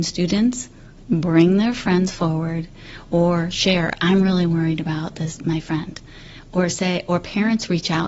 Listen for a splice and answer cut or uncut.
uncut